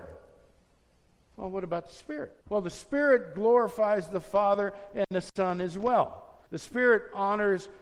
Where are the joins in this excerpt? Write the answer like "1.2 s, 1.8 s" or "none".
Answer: 2.4 s, 6.5 s